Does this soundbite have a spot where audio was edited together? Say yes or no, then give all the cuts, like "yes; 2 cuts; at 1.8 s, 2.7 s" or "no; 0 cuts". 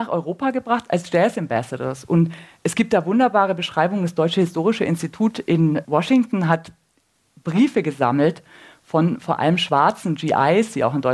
no; 0 cuts